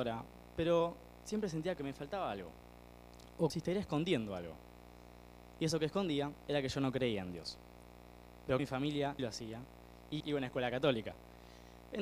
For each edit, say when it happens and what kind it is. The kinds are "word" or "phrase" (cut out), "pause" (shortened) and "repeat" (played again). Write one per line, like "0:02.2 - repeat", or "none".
0:01.8 - word
0:03.5 - word
0:08.6 - phrase
0:09.2 - word
0:10.2 - word